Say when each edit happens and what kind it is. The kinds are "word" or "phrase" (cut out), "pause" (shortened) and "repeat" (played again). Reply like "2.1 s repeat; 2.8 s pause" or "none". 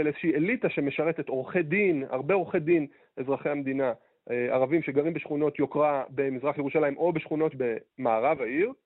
7.5 s word